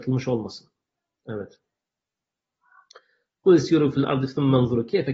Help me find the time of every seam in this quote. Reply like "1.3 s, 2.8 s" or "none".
none